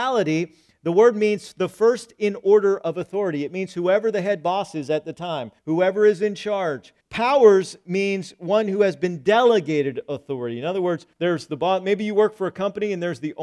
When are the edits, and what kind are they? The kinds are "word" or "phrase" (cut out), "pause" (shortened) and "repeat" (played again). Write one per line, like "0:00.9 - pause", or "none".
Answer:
0:05.6 - pause
0:07.0 - pause
0:11.1 - pause